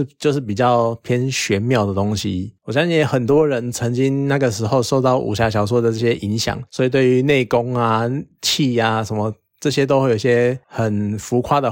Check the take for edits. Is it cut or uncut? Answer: cut